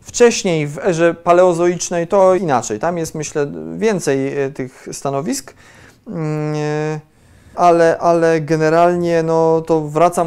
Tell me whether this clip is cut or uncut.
cut